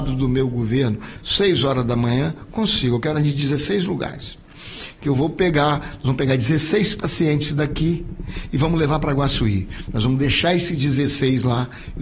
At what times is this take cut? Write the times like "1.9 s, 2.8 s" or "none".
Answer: none